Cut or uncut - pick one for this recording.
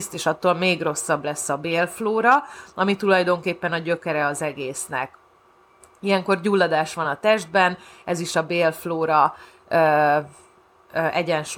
uncut